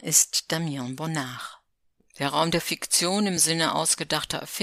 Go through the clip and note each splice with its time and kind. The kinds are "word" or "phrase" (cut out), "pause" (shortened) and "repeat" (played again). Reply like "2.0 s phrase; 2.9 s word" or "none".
none

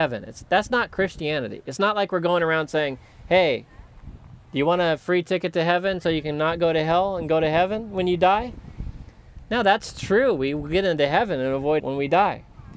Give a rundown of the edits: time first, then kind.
11.8 s word

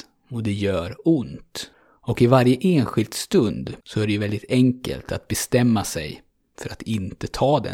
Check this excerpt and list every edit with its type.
1.7 s pause; 3.8 s pause

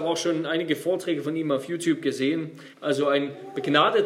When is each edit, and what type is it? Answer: 2.7 s pause

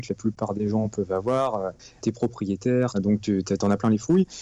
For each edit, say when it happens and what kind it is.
2.0 s word; 2.9 s phrase

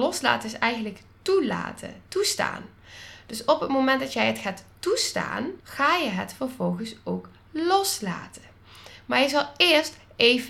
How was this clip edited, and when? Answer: 5.6 s pause

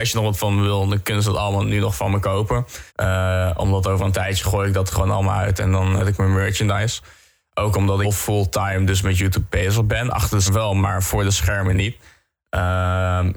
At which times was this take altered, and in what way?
2.9 s pause; 6.0 s word; 8.0 s phrase; 10.5 s word

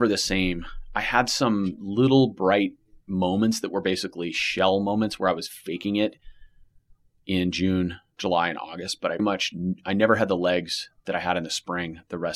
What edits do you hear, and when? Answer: 9.2 s word

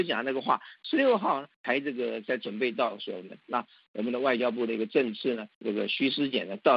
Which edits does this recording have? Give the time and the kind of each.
1.5 s pause; 5.5 s pause

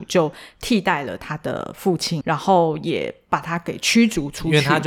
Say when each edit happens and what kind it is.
2.2 s word

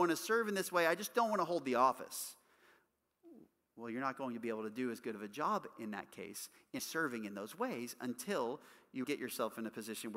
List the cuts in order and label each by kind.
6.8 s word; 9.0 s word

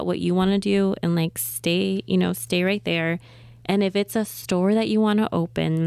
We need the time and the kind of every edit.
none

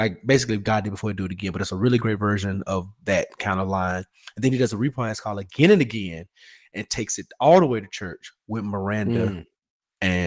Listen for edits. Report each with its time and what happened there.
none

